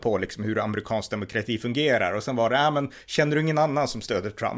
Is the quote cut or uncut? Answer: uncut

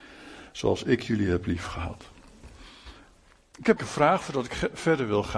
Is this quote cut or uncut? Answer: cut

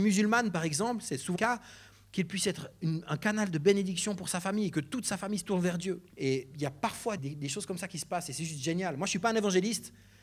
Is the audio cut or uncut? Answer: cut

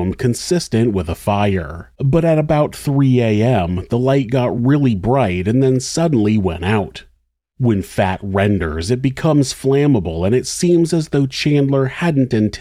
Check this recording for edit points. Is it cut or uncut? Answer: uncut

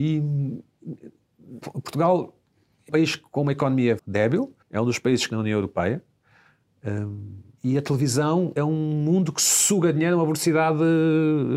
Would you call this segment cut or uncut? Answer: cut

